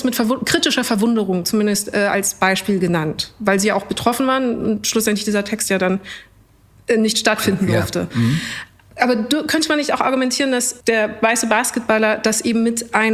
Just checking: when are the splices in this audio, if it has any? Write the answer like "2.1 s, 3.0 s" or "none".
none